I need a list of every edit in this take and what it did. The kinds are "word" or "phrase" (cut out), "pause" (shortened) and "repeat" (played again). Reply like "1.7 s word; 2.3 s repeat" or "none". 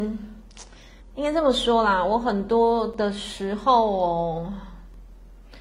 1.0 s pause